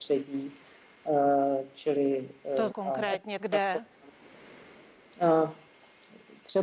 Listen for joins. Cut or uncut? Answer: cut